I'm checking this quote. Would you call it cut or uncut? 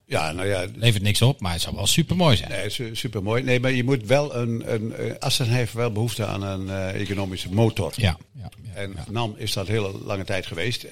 cut